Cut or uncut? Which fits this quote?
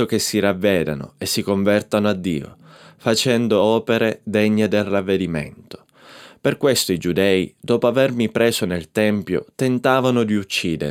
uncut